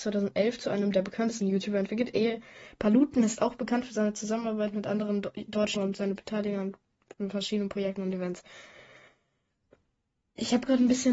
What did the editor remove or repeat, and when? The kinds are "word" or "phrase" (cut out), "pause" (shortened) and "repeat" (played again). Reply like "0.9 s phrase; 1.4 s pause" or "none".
1.4 s word; 5.8 s word